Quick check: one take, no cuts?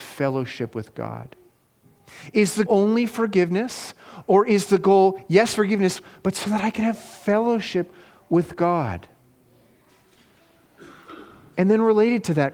no; 1 cut; at 2.7 s

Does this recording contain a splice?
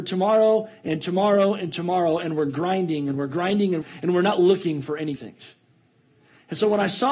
yes; 2 cuts; at 3.8 s, 5.2 s

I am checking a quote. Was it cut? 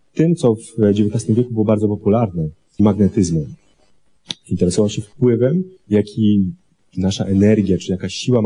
yes; 2 cuts; at 2.8 s, 5.8 s

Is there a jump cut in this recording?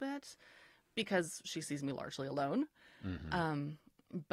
no; 0 cuts

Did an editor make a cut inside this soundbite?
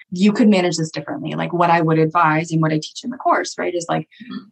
no; 0 cuts

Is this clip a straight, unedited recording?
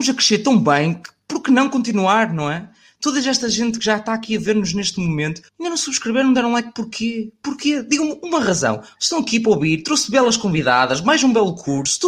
no; 1 cut; at 5.5 s

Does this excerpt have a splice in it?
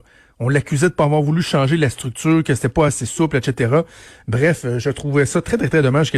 no; 0 cuts

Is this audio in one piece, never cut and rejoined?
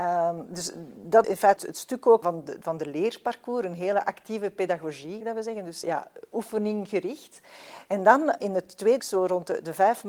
no; 7 cuts; at 1.2 s, 1.6 s, 2.2 s, 5.2 s, 5.8 s, 8.4 s, 9.0 s

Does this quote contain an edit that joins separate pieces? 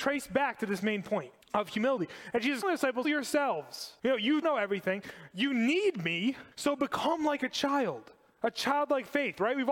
yes; 6 cuts; at 1.4 s, 2.6 s, 3.0 s, 4.0 s, 4.4 s, 6.5 s

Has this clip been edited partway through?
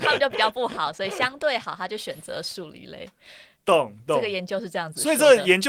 no; 0 cuts

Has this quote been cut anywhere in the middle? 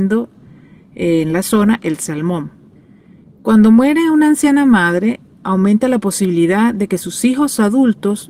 yes; 1 cut; at 2.8 s

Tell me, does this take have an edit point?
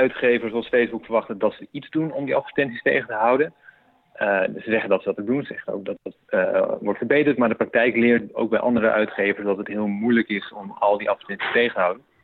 no; 0 cuts

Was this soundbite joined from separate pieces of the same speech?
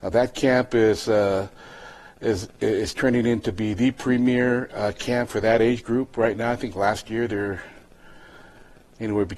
no; 0 cuts

